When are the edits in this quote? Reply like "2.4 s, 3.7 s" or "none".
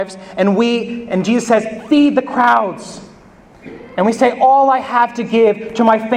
none